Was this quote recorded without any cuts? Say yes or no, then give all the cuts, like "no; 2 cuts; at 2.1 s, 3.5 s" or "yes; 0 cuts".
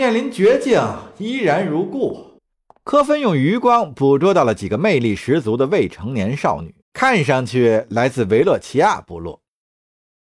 no; 2 cuts; at 2.4 s, 6.8 s